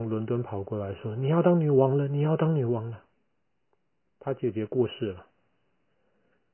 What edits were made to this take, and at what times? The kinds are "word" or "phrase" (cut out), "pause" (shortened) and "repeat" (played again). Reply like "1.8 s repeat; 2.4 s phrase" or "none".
3.1 s pause